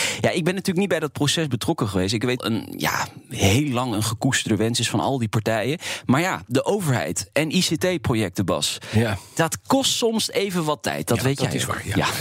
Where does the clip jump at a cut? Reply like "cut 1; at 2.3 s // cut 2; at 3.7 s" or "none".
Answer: cut 1; at 2.4 s